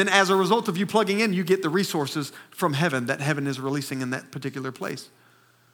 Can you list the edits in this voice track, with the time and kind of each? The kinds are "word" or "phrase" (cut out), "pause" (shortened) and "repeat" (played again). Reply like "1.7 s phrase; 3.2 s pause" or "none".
none